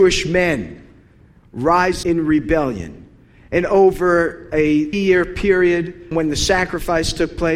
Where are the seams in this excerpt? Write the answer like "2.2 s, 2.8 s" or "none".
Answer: 2.0 s, 4.9 s, 6.1 s